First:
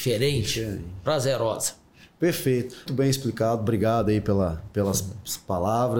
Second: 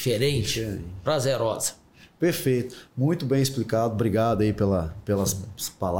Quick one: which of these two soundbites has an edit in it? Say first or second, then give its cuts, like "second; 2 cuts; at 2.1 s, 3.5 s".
first; 1 cut; at 2.9 s